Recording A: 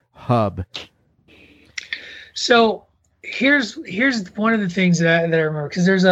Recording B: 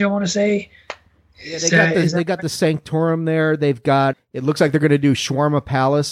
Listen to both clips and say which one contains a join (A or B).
B